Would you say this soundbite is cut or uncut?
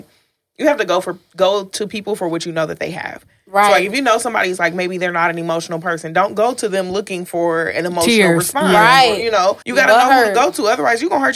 cut